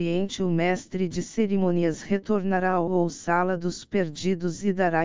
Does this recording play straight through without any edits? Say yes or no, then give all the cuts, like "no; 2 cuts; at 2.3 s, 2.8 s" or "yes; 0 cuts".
no; 2 cuts; at 2.9 s, 3.8 s